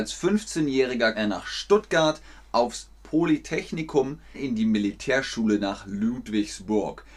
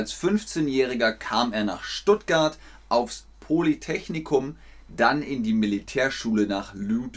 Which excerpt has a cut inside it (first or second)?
first